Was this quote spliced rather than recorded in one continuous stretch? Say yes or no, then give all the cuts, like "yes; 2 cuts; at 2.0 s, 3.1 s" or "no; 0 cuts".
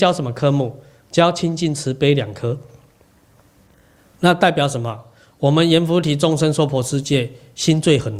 no; 0 cuts